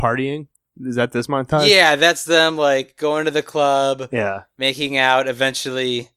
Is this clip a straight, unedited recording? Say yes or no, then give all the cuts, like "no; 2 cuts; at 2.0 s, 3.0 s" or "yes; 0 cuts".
yes; 0 cuts